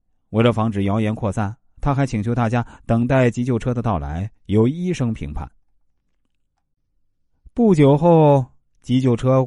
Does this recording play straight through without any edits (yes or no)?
yes